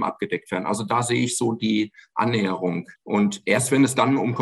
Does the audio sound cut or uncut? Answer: cut